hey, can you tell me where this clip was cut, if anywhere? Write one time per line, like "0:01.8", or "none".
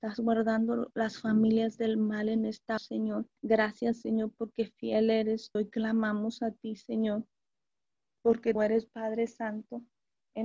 0:02.8
0:03.4
0:05.5
0:08.5
0:08.9